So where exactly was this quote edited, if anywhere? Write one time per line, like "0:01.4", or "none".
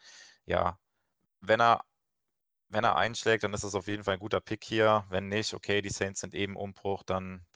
none